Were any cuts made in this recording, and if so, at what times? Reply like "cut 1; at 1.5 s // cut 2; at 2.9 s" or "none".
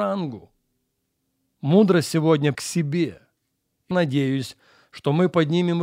cut 1; at 2.5 s // cut 2; at 3.9 s